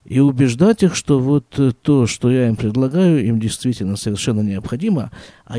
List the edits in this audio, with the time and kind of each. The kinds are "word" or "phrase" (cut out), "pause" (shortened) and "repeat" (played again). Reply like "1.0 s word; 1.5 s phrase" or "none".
none